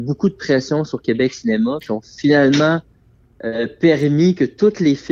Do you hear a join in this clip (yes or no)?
no